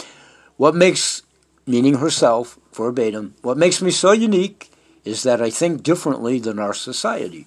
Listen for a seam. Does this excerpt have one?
no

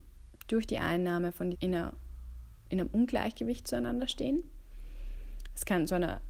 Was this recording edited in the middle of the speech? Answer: yes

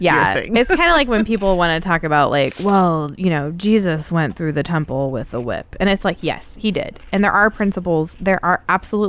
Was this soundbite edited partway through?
no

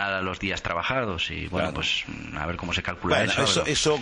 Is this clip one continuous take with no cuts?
yes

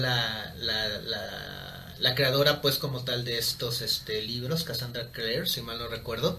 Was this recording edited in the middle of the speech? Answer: no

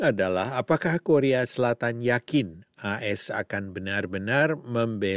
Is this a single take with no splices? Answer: yes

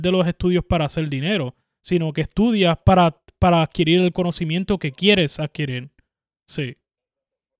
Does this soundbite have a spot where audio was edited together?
no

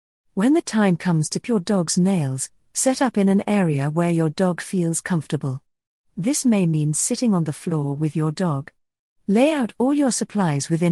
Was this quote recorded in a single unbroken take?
no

